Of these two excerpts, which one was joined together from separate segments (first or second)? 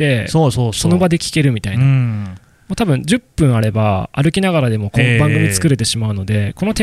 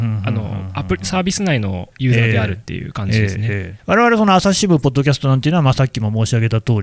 second